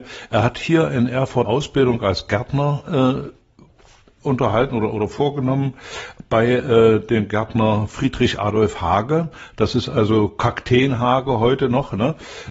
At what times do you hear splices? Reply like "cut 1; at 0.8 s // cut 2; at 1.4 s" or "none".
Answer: cut 1; at 1.4 s